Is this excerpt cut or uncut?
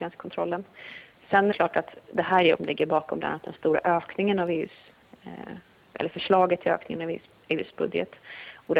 cut